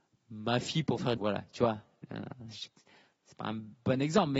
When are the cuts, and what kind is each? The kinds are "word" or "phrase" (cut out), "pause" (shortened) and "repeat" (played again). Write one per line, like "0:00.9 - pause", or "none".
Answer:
0:01.2 - phrase